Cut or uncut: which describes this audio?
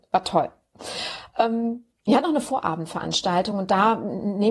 uncut